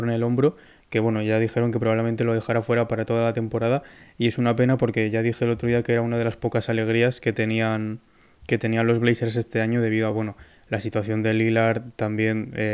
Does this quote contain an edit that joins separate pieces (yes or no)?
no